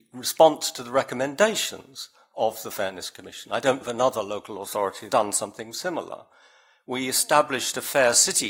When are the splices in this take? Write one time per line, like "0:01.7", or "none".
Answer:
0:03.8
0:05.1